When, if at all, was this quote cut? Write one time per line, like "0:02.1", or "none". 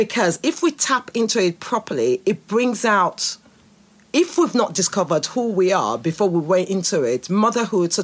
none